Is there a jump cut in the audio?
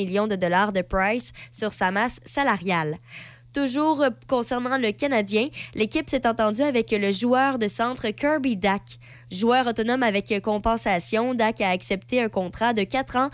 no; 0 cuts

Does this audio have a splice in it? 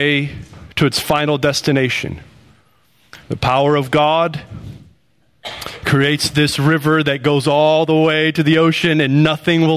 yes; 1 cut; at 3.2 s

